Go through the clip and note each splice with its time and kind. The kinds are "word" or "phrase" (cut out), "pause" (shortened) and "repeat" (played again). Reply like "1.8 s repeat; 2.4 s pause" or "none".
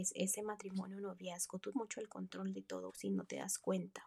1.7 s word; 2.9 s word

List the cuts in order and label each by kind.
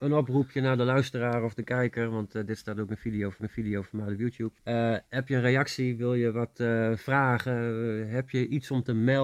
3.4 s repeat; 4.6 s pause

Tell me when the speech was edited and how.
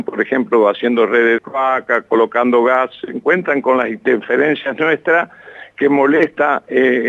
1.4 s word

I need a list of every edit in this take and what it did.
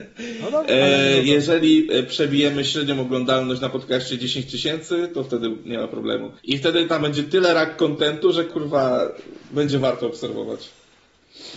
6.4 s pause

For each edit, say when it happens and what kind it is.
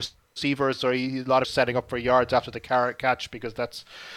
1.4 s phrase

